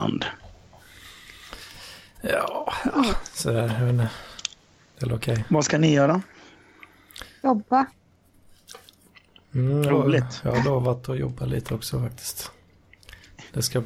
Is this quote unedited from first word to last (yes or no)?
no